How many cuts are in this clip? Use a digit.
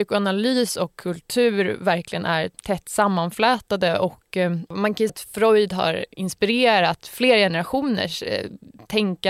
2